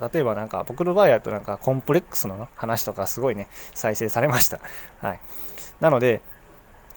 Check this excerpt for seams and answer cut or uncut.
uncut